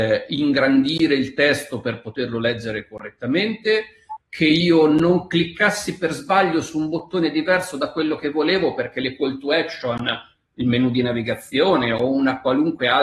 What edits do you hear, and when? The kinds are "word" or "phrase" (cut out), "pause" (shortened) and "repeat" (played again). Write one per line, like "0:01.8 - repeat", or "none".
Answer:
none